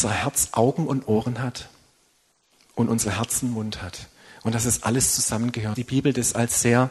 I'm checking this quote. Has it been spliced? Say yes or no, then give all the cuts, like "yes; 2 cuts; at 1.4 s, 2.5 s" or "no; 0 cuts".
yes; 1 cut; at 5.8 s